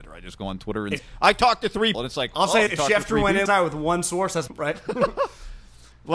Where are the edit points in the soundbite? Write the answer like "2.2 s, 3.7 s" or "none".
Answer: 1.0 s, 1.9 s, 2.7 s, 3.5 s, 4.5 s